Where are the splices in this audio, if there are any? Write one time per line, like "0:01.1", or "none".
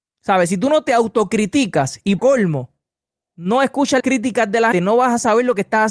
0:02.2
0:04.0
0:04.7